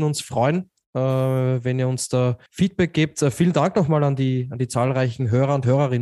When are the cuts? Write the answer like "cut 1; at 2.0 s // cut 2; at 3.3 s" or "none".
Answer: cut 1; at 2.5 s